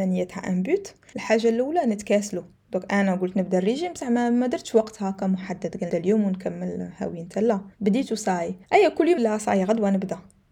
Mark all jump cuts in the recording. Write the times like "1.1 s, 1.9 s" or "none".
1.1 s, 5.9 s, 7.7 s, 8.6 s, 9.2 s